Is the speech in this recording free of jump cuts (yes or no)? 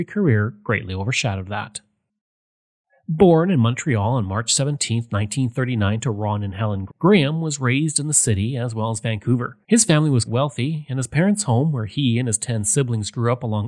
no